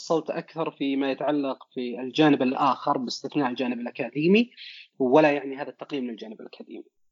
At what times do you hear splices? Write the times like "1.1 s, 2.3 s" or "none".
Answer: none